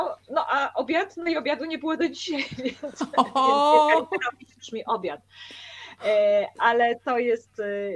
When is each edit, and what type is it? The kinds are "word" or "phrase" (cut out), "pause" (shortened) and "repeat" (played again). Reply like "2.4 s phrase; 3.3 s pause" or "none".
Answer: none